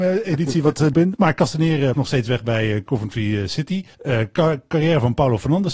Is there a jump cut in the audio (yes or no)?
yes